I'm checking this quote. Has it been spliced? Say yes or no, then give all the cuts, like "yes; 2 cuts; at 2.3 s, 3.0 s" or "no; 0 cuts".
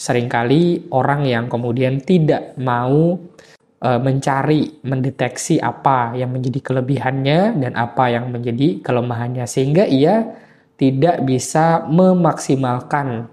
no; 0 cuts